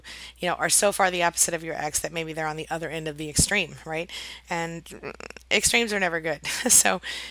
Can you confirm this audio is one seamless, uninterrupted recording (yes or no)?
yes